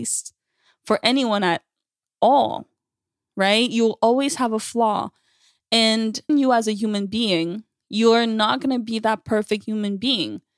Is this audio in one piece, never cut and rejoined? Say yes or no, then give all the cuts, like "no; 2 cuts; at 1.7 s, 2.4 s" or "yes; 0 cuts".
no; 1 cut; at 6.3 s